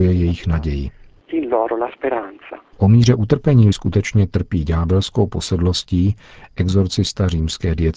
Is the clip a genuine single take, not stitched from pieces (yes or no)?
no